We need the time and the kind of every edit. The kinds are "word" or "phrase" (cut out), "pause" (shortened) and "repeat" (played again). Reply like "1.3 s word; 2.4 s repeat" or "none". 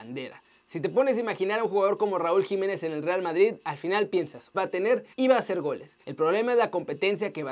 4.5 s word; 5.1 s pause; 6.0 s pause